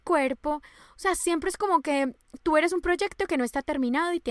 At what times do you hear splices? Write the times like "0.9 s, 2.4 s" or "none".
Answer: none